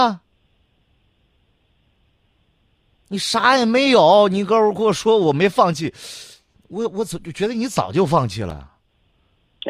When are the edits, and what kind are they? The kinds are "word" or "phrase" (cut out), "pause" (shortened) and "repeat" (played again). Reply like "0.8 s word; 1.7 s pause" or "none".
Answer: none